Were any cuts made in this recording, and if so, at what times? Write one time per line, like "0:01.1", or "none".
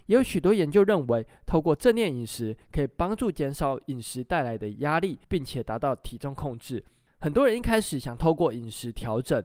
0:05.2